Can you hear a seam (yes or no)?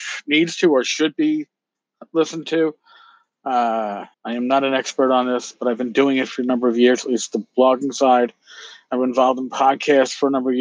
yes